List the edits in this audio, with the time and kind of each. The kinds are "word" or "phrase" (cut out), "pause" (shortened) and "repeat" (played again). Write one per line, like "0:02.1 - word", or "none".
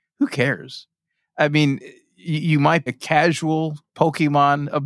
0:02.9 - word